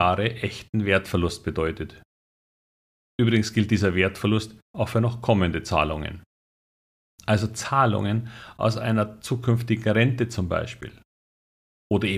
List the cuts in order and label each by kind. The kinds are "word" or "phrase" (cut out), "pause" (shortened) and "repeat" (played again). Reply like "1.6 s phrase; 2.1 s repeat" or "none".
4.6 s pause